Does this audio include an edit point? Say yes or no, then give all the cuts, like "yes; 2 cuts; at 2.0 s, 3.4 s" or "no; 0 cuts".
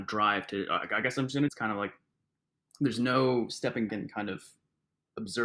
yes; 2 cuts; at 1.5 s, 3.9 s